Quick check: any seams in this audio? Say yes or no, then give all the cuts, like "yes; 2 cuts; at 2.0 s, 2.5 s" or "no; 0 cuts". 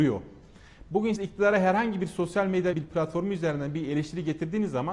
yes; 2 cuts; at 1.2 s, 2.7 s